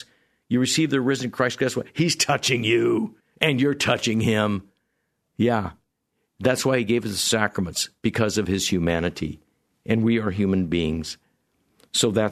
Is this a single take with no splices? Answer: no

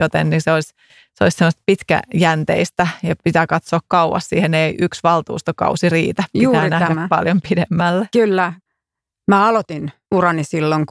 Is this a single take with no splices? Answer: yes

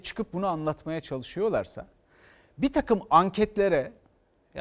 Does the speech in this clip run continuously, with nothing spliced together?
yes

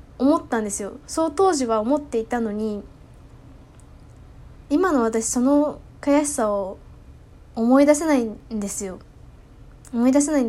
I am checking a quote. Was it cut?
no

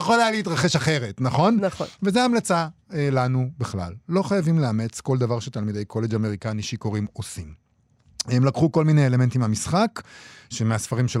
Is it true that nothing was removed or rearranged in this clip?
yes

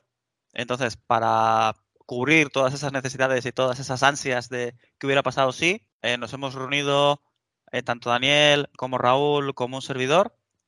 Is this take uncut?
yes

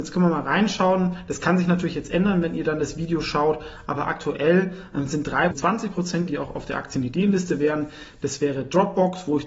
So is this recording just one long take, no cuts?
no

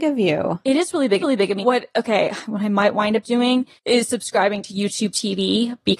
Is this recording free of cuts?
no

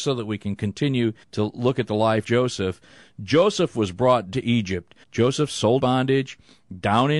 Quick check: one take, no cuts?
no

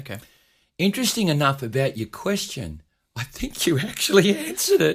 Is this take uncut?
yes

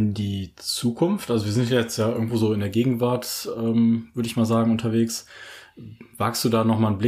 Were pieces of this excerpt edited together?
no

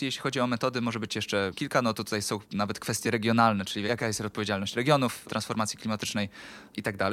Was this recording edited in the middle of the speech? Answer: no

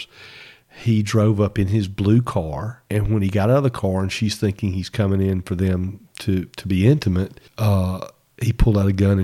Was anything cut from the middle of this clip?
yes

